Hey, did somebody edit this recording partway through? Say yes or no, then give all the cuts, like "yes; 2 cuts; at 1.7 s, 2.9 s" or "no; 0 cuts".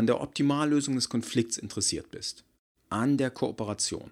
no; 0 cuts